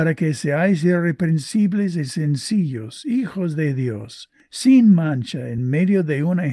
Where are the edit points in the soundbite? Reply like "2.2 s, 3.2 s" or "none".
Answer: none